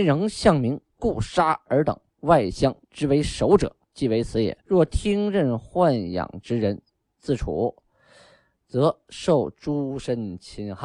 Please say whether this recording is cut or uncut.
cut